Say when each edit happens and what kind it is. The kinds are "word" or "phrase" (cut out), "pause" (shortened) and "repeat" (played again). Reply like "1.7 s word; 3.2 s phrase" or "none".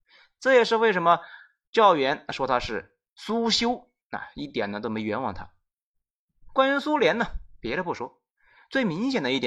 none

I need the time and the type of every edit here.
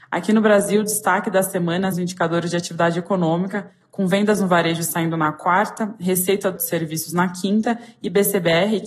1.9 s word; 6.6 s word

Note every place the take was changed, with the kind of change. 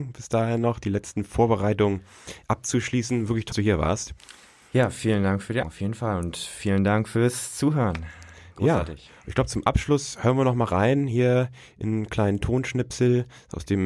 3.5 s word; 5.6 s word

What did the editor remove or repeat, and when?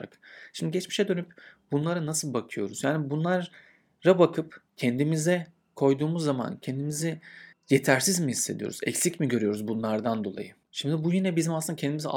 4.7 s pause; 7.5 s pause; 10.6 s pause

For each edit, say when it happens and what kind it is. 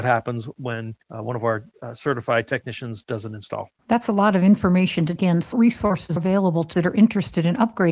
1.0 s pause; 3.8 s pause; 5.2 s word; 5.5 s word; 6.2 s word; 6.7 s word

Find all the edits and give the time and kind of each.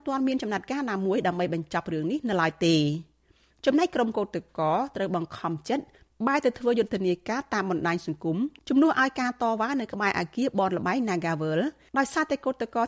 none

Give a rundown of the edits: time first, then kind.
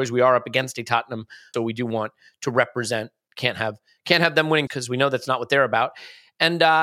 1.5 s word; 4.7 s word

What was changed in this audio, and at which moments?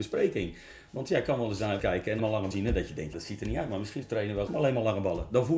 1.8 s word; 2.2 s word; 2.5 s word; 3.1 s word; 4.0 s word; 4.5 s word

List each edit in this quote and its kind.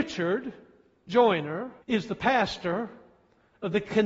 1.8 s pause

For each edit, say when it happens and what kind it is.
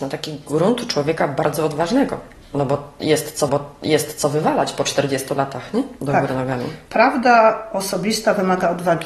3.5 s repeat

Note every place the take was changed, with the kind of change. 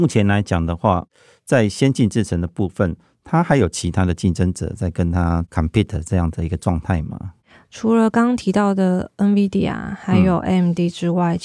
none

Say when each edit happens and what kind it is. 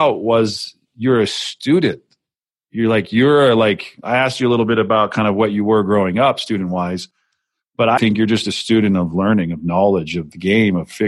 8.0 s word

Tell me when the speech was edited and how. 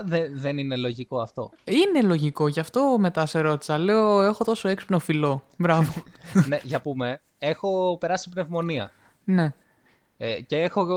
6.8 s phrase

